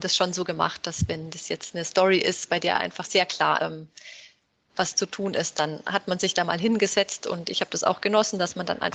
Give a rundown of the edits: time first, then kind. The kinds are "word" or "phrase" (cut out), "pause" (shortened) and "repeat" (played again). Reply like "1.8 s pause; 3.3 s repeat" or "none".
3.6 s word